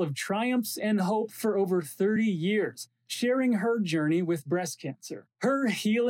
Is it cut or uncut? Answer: uncut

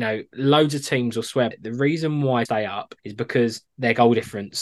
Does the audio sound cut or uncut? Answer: cut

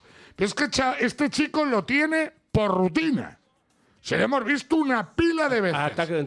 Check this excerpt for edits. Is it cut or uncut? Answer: uncut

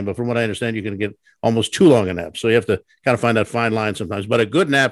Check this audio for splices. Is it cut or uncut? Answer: uncut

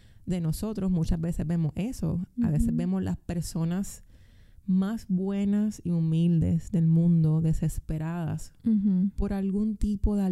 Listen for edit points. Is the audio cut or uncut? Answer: uncut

